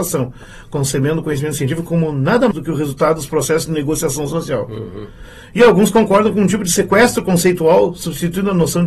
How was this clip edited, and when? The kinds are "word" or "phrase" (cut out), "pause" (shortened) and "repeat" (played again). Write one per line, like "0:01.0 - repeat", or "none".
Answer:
0:02.5 - word